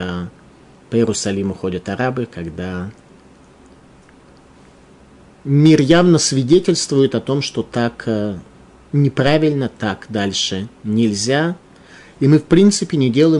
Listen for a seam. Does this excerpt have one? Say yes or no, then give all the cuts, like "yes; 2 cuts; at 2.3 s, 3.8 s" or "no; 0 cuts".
no; 0 cuts